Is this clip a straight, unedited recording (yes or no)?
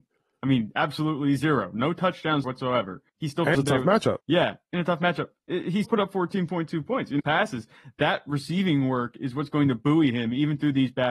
no